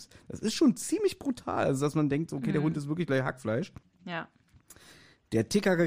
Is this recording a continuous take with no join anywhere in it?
no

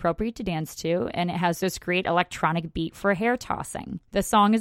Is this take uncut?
yes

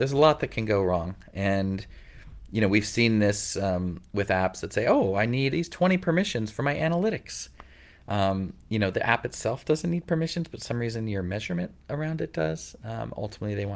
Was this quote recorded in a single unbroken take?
no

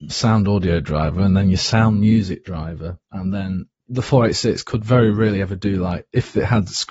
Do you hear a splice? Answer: yes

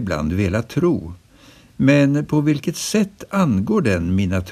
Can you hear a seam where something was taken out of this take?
no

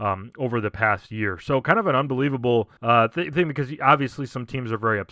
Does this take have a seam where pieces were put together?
yes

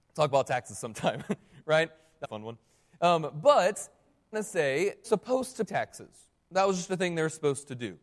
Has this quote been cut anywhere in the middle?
yes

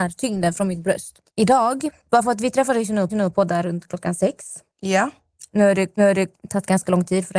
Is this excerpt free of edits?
no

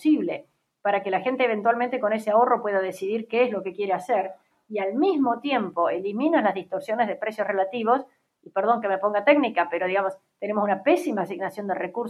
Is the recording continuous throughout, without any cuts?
yes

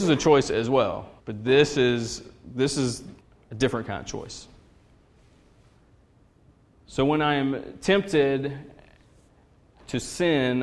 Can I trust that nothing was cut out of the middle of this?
no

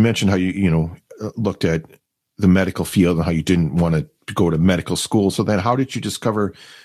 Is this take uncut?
yes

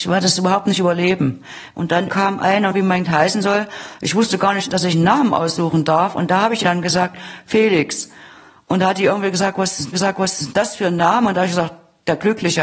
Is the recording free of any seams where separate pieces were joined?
no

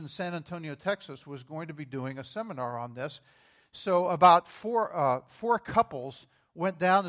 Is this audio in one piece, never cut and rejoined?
yes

